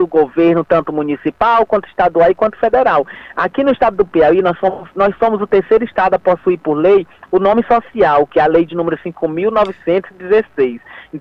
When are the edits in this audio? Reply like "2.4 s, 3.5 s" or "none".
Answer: none